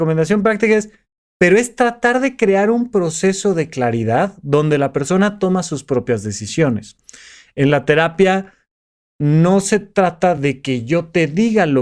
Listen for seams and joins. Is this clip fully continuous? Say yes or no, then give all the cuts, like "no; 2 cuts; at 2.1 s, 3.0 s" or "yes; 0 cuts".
yes; 0 cuts